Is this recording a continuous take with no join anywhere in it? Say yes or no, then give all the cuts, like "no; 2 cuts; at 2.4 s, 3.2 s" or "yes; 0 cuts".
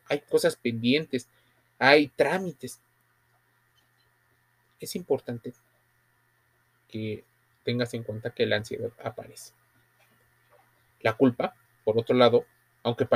yes; 0 cuts